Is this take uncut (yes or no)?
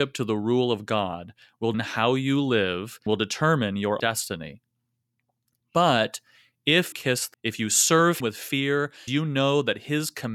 no